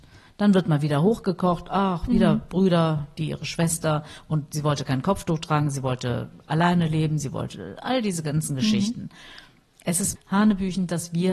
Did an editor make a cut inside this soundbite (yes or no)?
yes